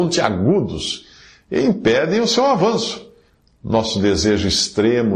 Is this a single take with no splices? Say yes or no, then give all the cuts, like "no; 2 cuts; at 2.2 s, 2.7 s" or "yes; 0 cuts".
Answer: yes; 0 cuts